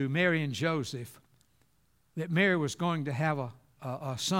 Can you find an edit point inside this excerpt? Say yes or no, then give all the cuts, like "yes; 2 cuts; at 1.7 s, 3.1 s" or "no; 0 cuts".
no; 0 cuts